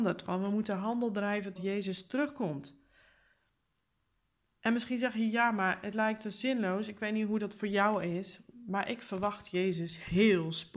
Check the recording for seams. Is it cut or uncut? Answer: cut